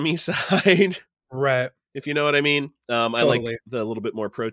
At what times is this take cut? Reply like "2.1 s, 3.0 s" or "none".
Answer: none